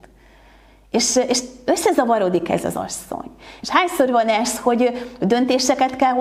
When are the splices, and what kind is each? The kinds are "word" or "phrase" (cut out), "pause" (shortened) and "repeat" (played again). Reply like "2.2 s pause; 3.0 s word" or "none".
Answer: none